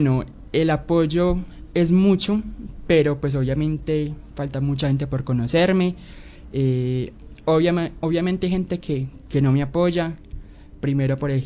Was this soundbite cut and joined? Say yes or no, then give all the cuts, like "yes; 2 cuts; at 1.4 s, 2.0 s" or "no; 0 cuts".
no; 0 cuts